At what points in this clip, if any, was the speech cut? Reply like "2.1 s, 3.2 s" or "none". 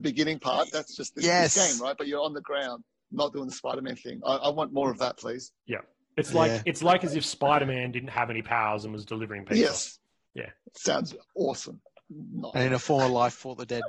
11.2 s